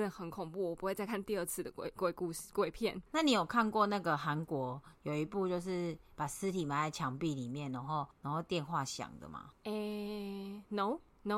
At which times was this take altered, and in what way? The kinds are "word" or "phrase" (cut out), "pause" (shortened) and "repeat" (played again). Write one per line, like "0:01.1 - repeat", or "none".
0:03.1 - pause
0:08.1 - pause